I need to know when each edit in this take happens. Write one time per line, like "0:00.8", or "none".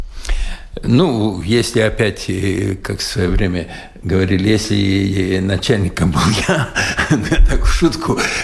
none